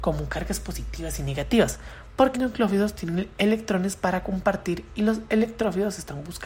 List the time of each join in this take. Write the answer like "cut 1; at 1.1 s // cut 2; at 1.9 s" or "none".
cut 1; at 2.3 s